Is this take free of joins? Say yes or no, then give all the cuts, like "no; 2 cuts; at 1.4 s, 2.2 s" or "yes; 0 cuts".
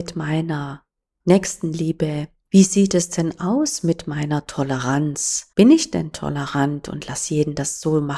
no; 1 cut; at 5.5 s